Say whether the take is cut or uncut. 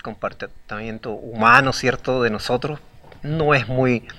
uncut